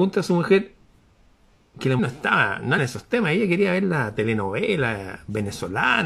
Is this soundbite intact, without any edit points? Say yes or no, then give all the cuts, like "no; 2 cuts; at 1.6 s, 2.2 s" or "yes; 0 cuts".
no; 2 cuts; at 2.0 s, 2.8 s